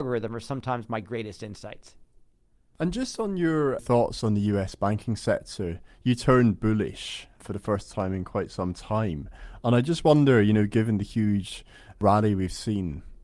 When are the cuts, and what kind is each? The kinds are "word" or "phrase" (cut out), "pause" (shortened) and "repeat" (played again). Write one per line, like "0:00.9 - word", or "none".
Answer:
none

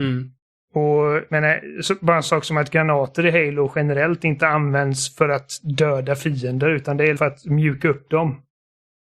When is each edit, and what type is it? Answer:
0:02.2 - word
0:07.2 - word

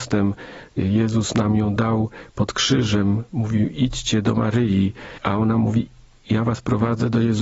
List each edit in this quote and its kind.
none

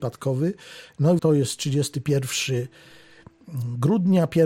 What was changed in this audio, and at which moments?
0:01.2 - word

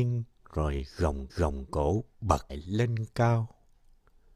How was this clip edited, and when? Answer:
0:01.3 - repeat
0:02.5 - word

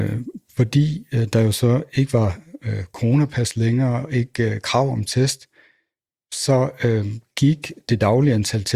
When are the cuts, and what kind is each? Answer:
none

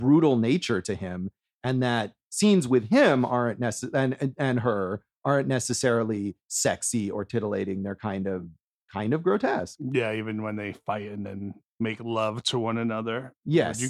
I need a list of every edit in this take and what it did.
none

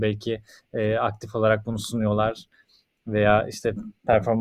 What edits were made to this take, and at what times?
none

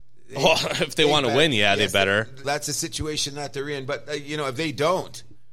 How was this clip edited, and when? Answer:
0:02.4 - word

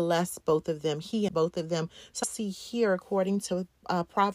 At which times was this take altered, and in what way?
0:01.3 - word
0:02.2 - phrase

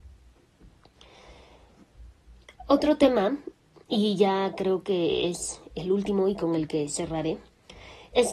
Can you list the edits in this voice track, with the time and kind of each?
none

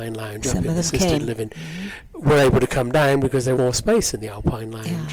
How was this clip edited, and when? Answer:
0:03.6 - word

